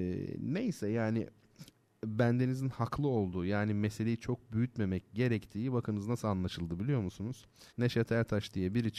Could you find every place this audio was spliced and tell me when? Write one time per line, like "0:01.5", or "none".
0:07.7